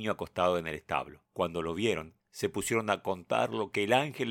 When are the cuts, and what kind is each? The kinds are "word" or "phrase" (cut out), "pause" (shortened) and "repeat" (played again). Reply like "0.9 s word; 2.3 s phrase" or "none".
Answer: 1.3 s pause; 2.2 s pause

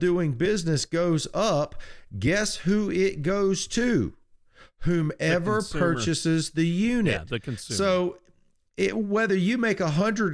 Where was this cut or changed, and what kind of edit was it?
none

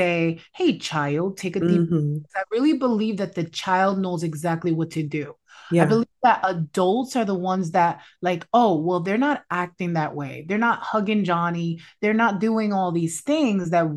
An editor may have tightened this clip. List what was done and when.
none

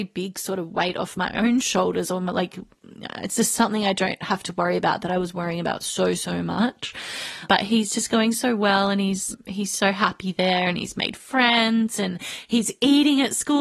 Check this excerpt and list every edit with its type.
none

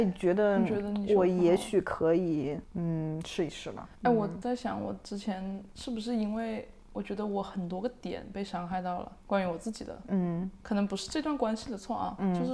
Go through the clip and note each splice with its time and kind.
3.9 s pause; 9.2 s pause

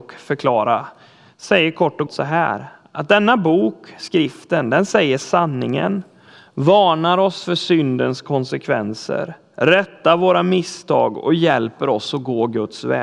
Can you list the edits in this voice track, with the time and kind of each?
2.1 s word

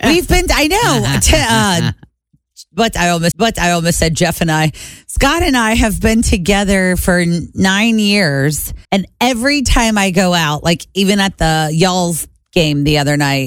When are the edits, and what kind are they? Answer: 3.3 s repeat; 8.8 s pause

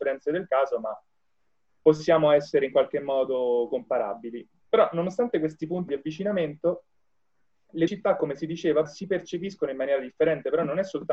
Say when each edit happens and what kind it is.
5.9 s word; 7.9 s word; 8.9 s word

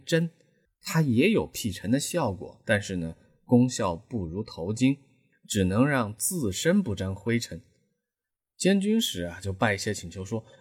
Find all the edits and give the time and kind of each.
none

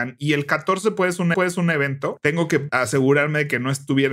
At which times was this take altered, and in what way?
1.3 s repeat

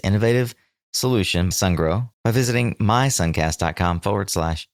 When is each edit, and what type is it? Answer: 1.5 s word; 2.1 s pause

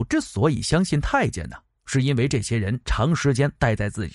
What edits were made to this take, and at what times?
none

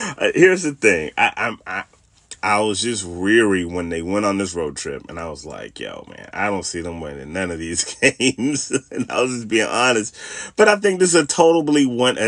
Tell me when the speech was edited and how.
none

